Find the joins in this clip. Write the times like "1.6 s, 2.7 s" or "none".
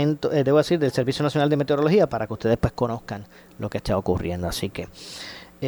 2.1 s